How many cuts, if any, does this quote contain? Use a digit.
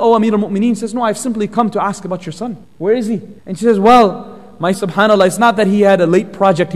3